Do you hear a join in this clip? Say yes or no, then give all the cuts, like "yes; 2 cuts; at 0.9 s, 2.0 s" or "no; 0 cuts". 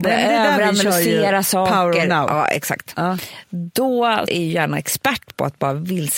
yes; 1 cut; at 4.3 s